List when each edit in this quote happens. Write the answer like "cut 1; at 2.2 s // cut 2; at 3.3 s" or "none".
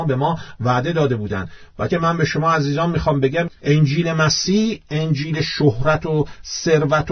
cut 1; at 1.9 s